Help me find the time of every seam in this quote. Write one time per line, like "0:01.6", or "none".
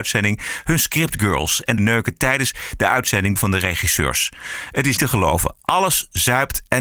0:01.8
0:03.4
0:05.0